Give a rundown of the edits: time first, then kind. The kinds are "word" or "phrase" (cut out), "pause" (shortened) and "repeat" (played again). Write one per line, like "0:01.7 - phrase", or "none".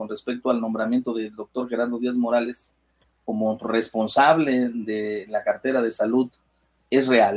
none